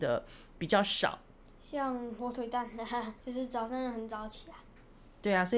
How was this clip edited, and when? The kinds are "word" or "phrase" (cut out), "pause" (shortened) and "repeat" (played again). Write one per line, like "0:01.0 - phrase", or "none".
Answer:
0:03.2 - pause